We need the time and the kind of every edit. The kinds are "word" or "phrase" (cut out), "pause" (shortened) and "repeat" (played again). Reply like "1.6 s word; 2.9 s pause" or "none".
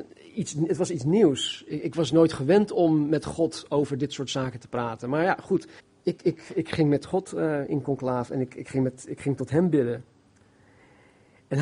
5.8 s pause